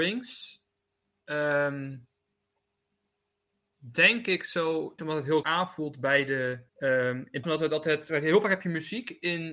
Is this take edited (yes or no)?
yes